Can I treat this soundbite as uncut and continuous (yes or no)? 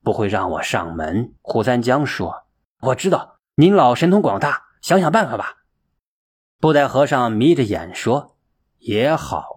no